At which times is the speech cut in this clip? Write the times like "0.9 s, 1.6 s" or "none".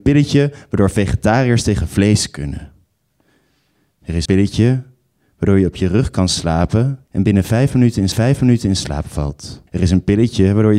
4.3 s, 7.1 s, 8.1 s, 9.7 s